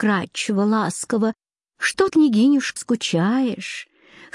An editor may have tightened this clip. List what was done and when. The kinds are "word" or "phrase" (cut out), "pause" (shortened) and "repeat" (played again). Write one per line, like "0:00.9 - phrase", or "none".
0:02.1 - word
0:02.8 - word